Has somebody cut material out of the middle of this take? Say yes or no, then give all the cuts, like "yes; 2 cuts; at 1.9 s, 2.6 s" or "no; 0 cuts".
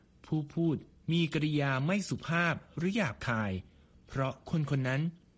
no; 0 cuts